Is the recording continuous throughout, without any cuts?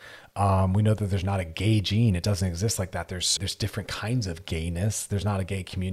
no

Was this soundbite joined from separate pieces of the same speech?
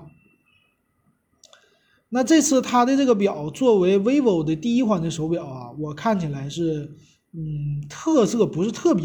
no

